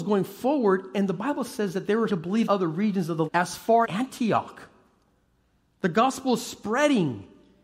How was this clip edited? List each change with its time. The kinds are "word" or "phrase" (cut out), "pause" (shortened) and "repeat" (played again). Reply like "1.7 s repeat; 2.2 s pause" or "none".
2.1 s word; 2.5 s word; 3.3 s word; 3.8 s word